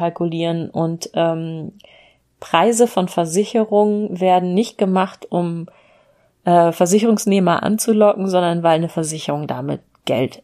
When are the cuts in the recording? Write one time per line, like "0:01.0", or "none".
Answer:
none